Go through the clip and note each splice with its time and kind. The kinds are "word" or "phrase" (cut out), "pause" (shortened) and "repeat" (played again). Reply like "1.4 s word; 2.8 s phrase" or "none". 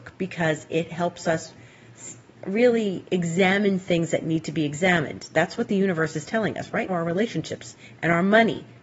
6.9 s word